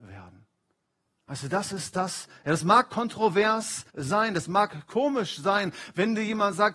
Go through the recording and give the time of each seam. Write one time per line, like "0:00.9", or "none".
0:03.9